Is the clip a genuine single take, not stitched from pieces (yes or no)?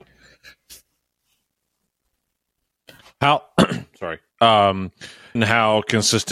no